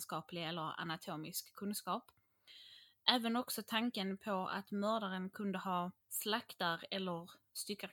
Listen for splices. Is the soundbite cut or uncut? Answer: cut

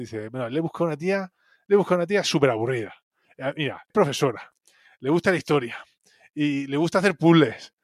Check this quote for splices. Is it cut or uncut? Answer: cut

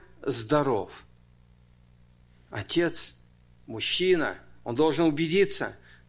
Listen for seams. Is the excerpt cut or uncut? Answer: uncut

